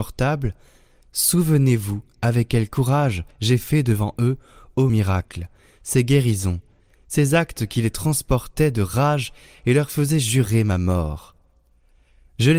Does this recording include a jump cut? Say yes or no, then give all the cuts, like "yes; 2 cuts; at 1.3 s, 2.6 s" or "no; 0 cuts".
yes; 2 cuts; at 3.3 s, 4.9 s